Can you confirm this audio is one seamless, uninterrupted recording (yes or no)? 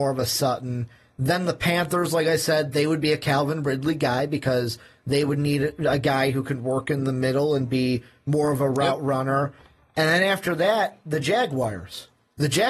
yes